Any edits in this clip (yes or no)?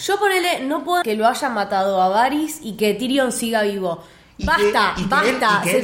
yes